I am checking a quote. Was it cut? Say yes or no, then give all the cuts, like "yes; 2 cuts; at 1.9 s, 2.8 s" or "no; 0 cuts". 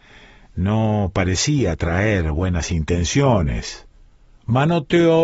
no; 0 cuts